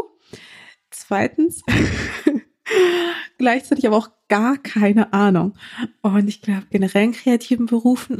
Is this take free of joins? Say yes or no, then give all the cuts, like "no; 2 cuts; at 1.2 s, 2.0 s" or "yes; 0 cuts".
yes; 0 cuts